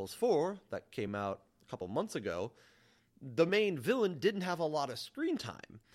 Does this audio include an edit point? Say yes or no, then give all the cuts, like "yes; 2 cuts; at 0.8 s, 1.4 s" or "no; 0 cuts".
no; 0 cuts